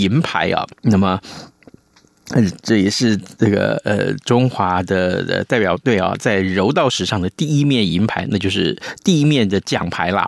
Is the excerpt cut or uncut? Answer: uncut